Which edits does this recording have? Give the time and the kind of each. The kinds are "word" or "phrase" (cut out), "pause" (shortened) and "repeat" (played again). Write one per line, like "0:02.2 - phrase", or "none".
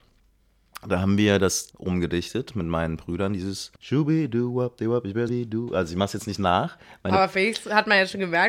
0:01.7 - word
0:03.8 - pause
0:05.3 - phrase